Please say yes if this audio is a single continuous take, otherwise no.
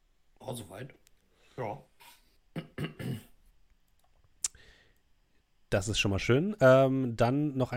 yes